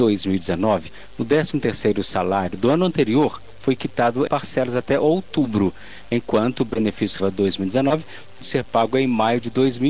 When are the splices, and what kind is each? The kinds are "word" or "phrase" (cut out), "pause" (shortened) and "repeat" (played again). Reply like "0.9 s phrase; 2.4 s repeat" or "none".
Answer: 4.3 s word; 7.2 s word; 8.4 s word